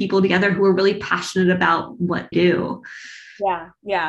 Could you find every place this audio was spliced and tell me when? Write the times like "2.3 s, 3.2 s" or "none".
2.3 s

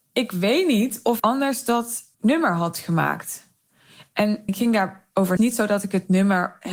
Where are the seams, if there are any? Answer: 1.2 s, 2.1 s, 4.5 s, 5.4 s

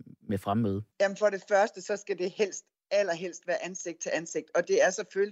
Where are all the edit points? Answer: 0.9 s

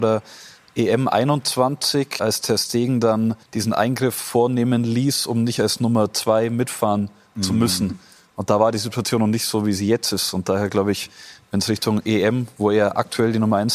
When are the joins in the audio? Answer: 2.2 s, 3.4 s

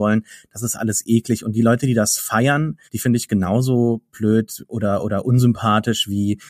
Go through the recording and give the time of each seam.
2.9 s

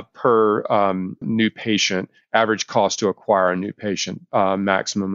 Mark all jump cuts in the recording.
1.2 s

